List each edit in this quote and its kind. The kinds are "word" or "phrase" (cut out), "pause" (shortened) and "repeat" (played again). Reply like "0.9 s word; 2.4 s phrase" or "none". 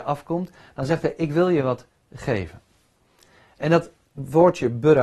none